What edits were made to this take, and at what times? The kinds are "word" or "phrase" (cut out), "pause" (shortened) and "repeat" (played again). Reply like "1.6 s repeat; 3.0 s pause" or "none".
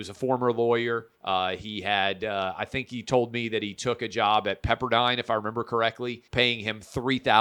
1.1 s pause; 6.3 s pause